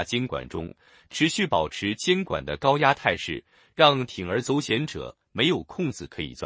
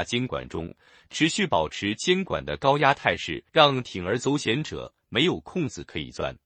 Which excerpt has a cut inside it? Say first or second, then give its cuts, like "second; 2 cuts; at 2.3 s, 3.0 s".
second; 1 cut; at 3.5 s